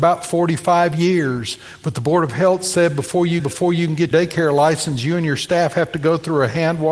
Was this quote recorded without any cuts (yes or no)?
no